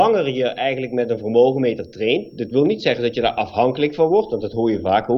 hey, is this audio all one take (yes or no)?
yes